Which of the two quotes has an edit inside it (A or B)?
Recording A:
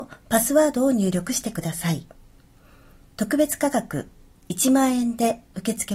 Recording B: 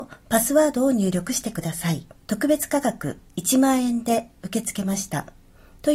B